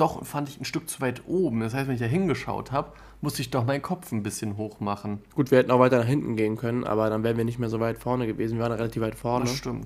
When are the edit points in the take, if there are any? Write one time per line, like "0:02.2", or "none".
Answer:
0:05.3